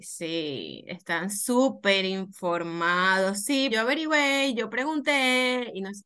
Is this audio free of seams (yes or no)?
no